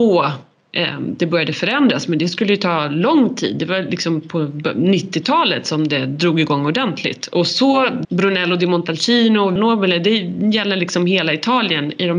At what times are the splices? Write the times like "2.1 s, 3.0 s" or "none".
8.0 s, 9.6 s